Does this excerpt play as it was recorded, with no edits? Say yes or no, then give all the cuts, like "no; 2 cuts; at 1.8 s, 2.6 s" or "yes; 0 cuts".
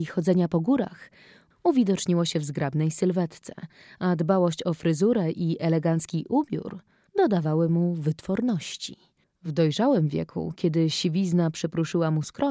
yes; 0 cuts